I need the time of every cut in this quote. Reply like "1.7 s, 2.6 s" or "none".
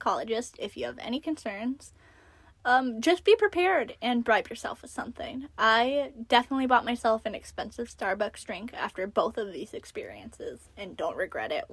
none